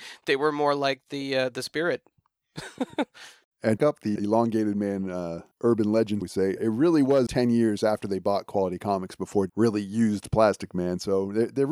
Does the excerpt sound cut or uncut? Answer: cut